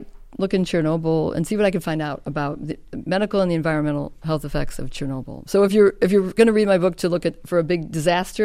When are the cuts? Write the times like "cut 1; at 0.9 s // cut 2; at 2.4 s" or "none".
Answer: none